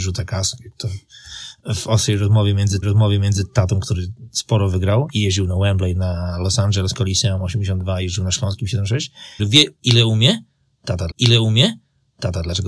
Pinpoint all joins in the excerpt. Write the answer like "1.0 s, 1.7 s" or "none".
2.8 s, 9.4 s, 11.1 s